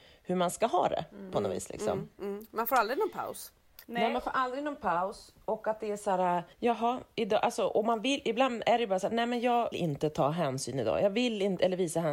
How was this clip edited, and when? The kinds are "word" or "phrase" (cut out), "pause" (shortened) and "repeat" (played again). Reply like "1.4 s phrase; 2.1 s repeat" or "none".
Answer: 3.8 s pause; 6.5 s pause; 9.7 s word